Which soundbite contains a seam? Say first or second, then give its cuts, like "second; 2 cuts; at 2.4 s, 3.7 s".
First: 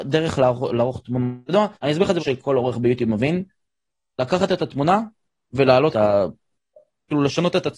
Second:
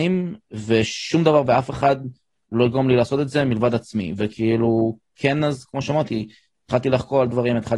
first; 3 cuts; at 1.8 s, 2.2 s, 5.9 s